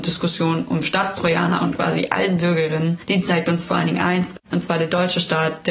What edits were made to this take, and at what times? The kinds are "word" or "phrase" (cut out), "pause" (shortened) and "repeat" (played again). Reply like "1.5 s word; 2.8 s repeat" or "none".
1.6 s phrase; 4.4 s pause